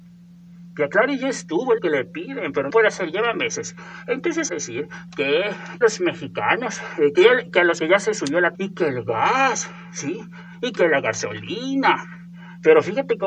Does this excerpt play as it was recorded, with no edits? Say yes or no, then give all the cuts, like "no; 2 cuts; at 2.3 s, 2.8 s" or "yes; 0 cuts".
no; 7 cuts; at 1.8 s, 2.7 s, 4.5 s, 5.8 s, 7.1 s, 7.8 s, 8.5 s